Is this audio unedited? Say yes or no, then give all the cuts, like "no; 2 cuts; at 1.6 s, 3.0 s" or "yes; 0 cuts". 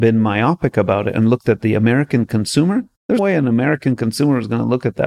no; 1 cut; at 3.2 s